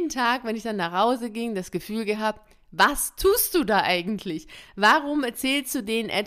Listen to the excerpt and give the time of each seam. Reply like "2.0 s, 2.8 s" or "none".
none